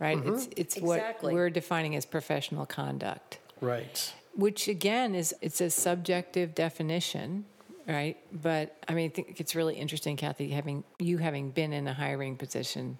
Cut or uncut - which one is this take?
cut